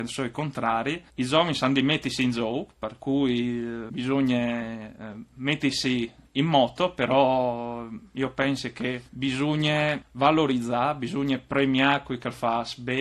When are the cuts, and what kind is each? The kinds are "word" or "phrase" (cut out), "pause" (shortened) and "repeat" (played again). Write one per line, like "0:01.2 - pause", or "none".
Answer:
0:01.1 - pause
0:09.1 - pause